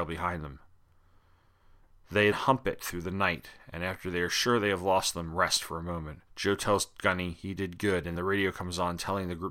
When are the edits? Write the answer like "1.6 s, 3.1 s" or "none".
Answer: 2.3 s, 6.3 s, 8.2 s